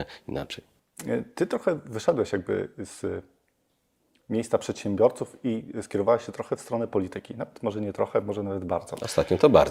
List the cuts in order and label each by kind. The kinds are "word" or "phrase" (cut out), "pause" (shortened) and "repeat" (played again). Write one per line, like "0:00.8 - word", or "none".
none